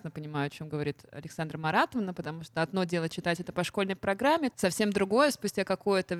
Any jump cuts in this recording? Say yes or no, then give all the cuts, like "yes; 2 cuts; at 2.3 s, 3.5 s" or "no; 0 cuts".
no; 0 cuts